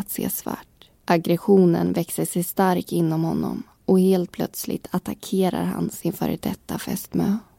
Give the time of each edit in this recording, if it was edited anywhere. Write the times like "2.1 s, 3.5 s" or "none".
0.9 s